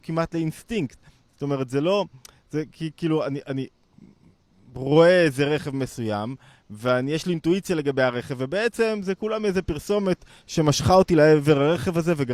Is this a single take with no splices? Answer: yes; 0 cuts

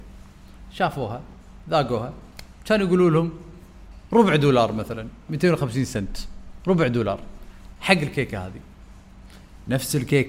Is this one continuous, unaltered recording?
yes; 0 cuts

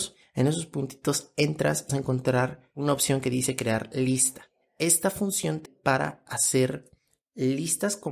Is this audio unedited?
no; 2 cuts; at 1.9 s, 5.7 s

